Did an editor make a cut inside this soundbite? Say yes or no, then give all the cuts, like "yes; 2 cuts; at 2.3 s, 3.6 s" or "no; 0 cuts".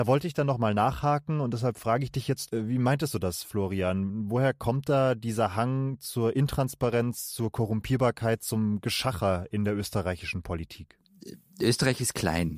no; 0 cuts